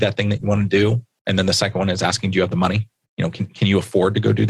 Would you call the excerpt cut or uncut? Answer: uncut